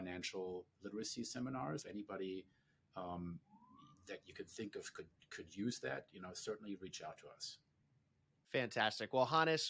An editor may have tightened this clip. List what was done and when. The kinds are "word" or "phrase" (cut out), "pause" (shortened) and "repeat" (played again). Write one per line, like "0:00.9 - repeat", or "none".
0:01.8 - word